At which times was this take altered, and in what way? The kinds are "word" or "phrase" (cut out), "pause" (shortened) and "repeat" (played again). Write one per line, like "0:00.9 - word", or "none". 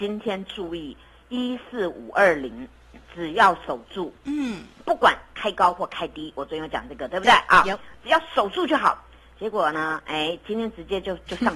none

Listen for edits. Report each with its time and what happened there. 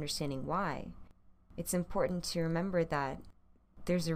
none

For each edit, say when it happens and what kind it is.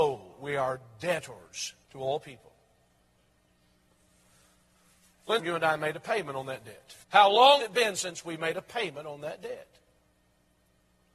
0:01.8 - pause
0:05.4 - phrase
0:07.0 - pause
0:07.6 - word

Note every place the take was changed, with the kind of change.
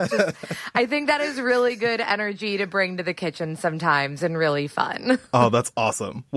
0:05.3 - pause

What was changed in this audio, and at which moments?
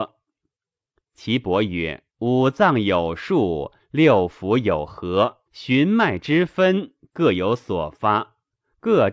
0:02.1 - pause
0:05.5 - pause

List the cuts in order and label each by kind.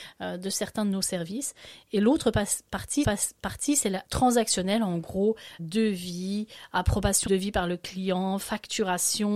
0:03.0 - repeat
0:04.1 - word
0:05.6 - word
0:07.3 - word

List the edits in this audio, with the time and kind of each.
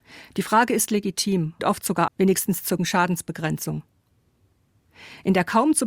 0:01.6 - word
0:02.1 - word
0:02.8 - word

